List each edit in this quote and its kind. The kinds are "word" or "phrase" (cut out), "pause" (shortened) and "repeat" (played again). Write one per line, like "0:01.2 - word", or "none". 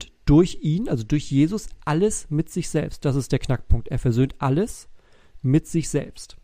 none

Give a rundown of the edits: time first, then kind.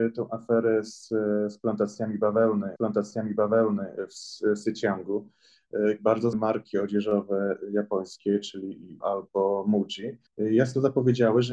0:02.8 - repeat
0:06.0 - word
0:06.3 - word
0:09.0 - word
0:10.3 - pause

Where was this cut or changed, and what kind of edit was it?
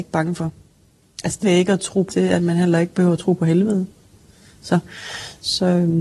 0:01.4 - phrase
0:02.1 - word

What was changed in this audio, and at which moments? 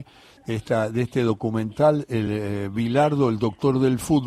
none

